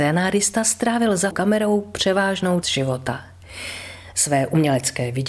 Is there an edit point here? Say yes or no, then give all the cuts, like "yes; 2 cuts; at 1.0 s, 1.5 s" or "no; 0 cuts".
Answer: yes; 2 cuts; at 1.3 s, 2.6 s